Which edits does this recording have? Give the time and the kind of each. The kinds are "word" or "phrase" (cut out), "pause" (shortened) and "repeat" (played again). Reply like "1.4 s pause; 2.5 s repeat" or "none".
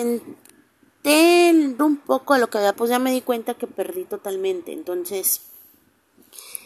1.8 s word; 2.7 s phrase

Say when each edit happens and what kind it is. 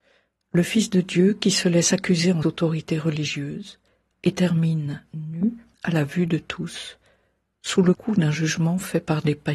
2.4 s phrase; 5.7 s pause

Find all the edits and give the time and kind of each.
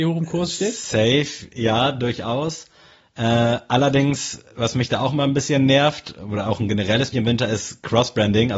7.1 s phrase

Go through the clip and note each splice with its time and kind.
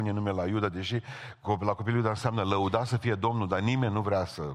none

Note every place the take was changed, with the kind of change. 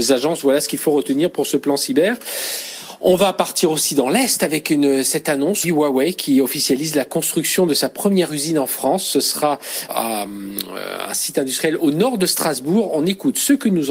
5.6 s word; 9.9 s word

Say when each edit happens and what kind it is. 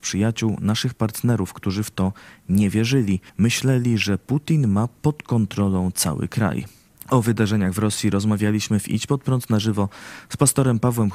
3.3 s pause; 6.9 s pause

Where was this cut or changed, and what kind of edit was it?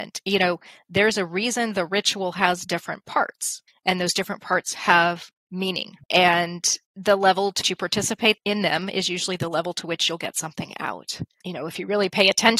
6.0 s pause; 7.6 s word

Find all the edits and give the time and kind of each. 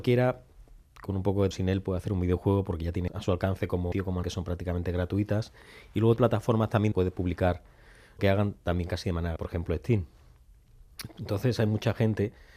1.5 s word; 3.1 s word; 3.9 s word; 4.2 s word; 6.2 s word; 6.9 s word; 8.2 s word; 9.4 s word

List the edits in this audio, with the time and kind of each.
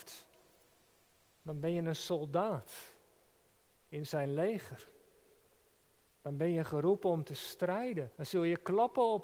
8.1 s pause

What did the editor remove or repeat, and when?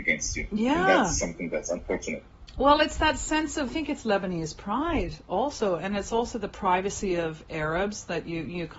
3.7 s phrase

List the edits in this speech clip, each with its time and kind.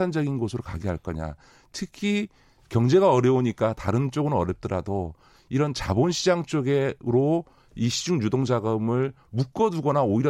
none

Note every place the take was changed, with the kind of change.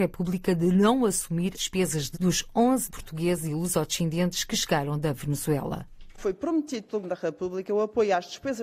1.5 s word; 2.1 s word; 2.9 s word; 7.0 s word

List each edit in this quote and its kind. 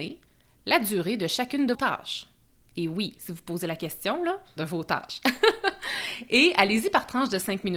1.7 s word; 4.6 s word

